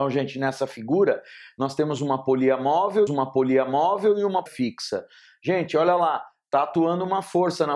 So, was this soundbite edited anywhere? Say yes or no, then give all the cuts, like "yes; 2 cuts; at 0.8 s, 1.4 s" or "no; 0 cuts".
yes; 2 cuts; at 3.1 s, 4.5 s